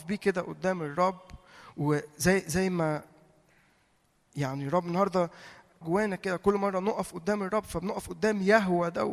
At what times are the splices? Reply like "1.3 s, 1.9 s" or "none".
5.8 s